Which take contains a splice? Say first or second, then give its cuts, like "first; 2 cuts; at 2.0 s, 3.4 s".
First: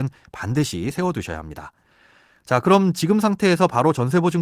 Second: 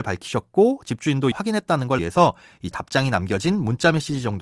second; 3 cuts; at 1.3 s, 2.0 s, 2.7 s